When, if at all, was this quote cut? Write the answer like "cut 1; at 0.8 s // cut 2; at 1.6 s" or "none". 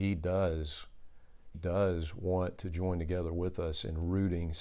cut 1; at 1.5 s